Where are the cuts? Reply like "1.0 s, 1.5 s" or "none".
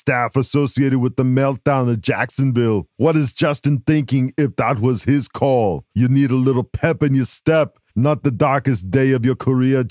2.9 s, 5.9 s, 7.9 s